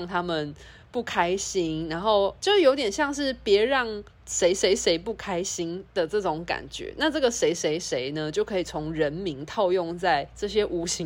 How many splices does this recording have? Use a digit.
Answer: 2